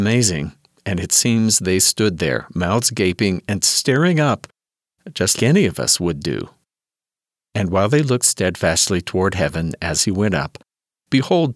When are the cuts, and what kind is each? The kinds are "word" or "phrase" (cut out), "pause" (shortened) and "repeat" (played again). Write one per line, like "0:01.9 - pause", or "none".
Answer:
0:05.4 - word